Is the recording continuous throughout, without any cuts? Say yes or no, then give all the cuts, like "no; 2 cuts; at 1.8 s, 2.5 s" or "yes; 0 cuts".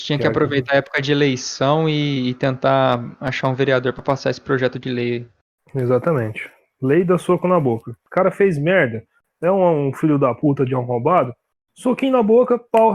yes; 0 cuts